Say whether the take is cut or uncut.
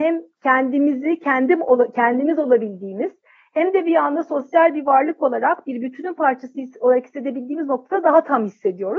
uncut